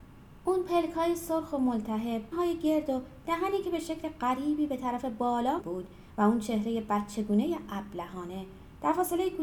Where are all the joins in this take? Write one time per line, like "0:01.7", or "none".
0:02.3
0:05.6